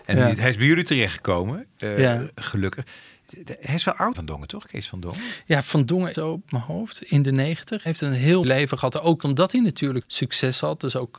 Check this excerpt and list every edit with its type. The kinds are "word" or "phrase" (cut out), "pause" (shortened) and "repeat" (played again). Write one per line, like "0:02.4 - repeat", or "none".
0:04.1 - word
0:06.1 - word
0:06.4 - word
0:08.4 - word
0:09.2 - word
0:10.0 - word